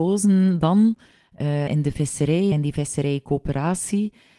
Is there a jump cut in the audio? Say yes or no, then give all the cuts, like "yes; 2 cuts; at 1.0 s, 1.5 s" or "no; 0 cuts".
yes; 2 cuts; at 1.7 s, 2.5 s